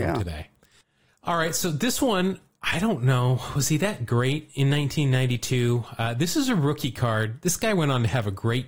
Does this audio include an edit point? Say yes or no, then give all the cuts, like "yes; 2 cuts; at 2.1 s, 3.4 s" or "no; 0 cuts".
no; 0 cuts